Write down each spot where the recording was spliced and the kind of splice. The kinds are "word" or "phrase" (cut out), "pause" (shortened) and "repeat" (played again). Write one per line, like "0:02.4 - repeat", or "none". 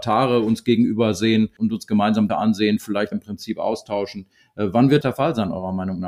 0:02.3 - word
0:03.1 - word
0:05.0 - word